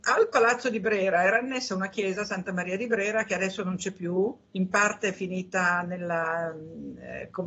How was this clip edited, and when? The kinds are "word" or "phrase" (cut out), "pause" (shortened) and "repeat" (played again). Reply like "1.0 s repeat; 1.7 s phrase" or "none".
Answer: 4.4 s pause